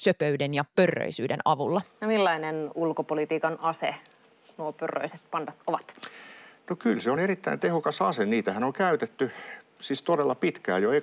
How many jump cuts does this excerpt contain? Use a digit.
0